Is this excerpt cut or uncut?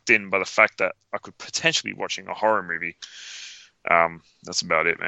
uncut